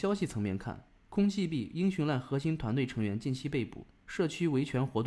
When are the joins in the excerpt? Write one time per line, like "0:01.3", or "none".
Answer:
0:01.0
0:04.0